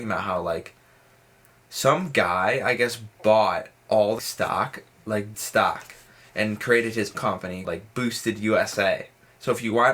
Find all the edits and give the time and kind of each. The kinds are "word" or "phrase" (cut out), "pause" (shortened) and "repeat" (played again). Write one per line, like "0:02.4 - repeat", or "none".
0:04.2 - word
0:05.3 - word
0:07.1 - word
0:07.6 - word